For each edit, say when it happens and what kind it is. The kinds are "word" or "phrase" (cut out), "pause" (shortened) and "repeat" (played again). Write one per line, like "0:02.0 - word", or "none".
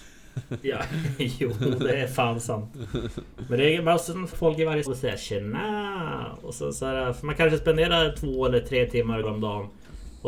0:04.3 - phrase
0:04.9 - word
0:09.2 - word